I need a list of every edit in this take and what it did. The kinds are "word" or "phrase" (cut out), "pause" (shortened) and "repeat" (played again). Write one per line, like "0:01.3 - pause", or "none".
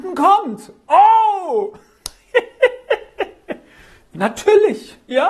0:04.1 - phrase